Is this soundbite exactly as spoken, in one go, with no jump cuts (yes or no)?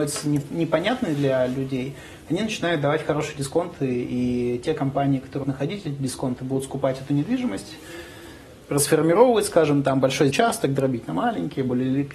no